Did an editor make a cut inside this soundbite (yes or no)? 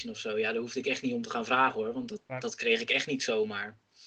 no